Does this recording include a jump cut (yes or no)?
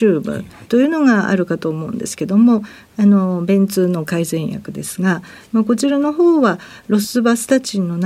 no